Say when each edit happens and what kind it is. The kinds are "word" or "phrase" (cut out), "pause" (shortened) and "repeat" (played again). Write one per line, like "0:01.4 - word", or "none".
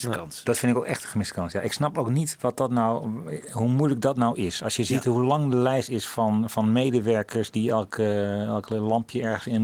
none